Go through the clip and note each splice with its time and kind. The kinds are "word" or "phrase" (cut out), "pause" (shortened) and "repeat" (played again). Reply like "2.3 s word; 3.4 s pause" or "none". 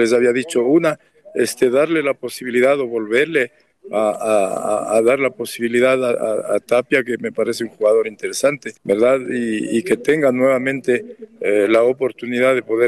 8.8 s pause